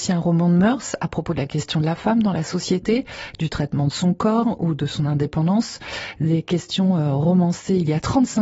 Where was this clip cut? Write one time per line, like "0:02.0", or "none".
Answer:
none

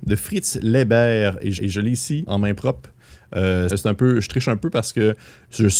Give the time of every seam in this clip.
0:01.6
0:02.3
0:03.7

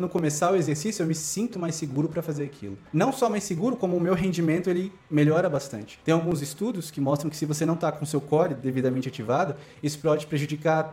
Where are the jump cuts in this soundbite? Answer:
0:01.5
0:02.9
0:06.0

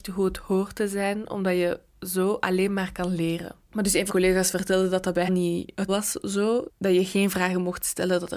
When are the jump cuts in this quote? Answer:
0:03.6
0:04.1
0:05.3
0:05.9
0:06.7

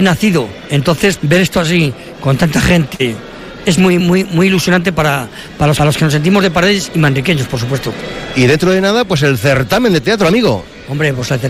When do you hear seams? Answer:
0:01.2
0:03.6
0:04.0
0:05.8

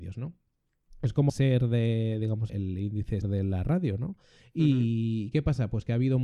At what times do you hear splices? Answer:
0:01.3
0:02.5
0:03.2

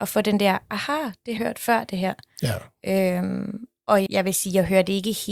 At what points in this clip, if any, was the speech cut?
0:01.4
0:04.1

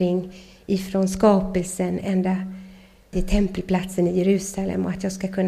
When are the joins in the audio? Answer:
0:03.1

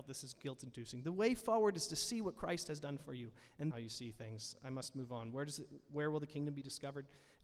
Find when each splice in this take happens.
0:03.7

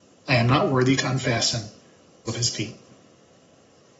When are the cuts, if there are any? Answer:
0:02.3

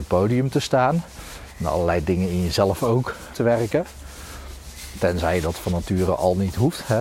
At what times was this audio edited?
0:03.3

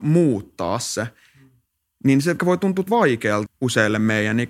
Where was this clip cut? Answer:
0:02.4
0:02.9
0:03.5

